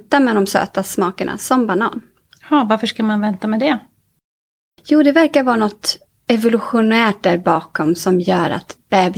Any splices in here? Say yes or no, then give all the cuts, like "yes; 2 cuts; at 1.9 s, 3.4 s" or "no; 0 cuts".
no; 0 cuts